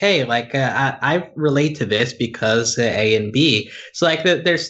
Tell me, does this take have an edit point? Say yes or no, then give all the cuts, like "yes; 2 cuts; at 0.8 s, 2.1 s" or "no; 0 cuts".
no; 0 cuts